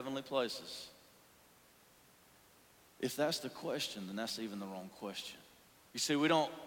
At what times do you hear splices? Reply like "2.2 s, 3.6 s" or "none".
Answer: none